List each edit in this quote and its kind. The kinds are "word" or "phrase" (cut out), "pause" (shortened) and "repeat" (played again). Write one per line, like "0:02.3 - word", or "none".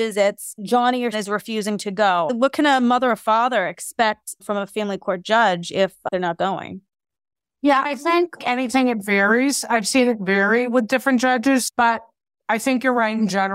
0:01.1 - word
0:08.4 - word